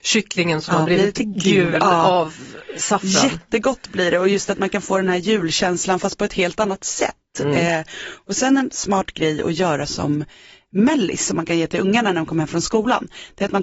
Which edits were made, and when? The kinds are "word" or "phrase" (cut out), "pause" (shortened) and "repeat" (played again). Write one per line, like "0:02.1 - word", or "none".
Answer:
none